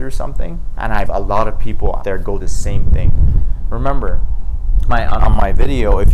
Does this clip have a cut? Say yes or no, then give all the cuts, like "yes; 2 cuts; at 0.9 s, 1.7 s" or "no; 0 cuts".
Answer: yes; 5 cuts; at 1.0 s, 2.0 s, 2.4 s, 4.9 s, 5.2 s